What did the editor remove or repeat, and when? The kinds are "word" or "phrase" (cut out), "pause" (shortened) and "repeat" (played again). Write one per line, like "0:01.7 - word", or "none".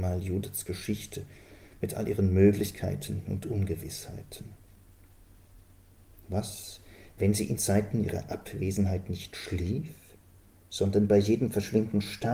0:07.6 - word